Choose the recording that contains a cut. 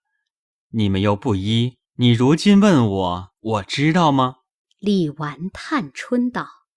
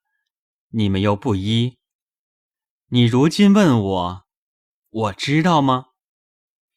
first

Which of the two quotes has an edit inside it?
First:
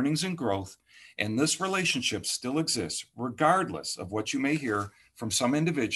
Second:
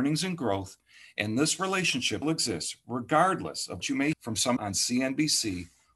second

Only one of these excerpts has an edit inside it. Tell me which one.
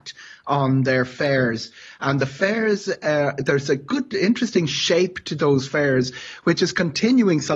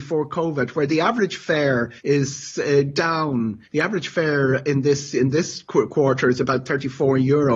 second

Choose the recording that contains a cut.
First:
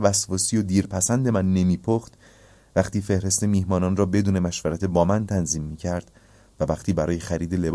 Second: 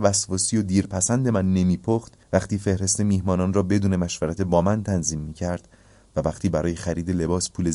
second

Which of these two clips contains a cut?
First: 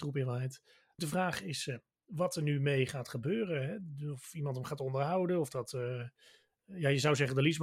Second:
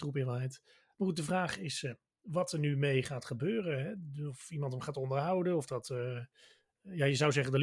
first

